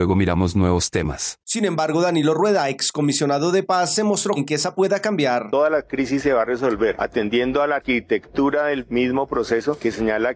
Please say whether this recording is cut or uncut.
cut